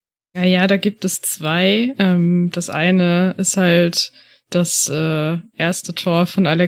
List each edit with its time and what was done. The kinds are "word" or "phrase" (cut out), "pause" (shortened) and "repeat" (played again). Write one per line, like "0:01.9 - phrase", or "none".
none